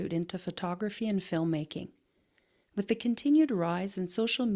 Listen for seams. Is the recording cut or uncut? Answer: uncut